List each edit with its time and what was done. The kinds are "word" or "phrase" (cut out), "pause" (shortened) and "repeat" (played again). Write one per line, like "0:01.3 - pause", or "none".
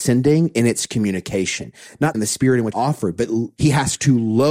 0:02.1 - word
0:02.7 - word
0:03.6 - word